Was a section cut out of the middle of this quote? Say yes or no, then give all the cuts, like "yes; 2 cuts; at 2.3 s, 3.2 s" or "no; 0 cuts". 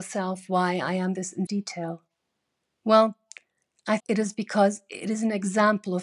yes; 3 cuts; at 1.1 s, 1.5 s, 4.0 s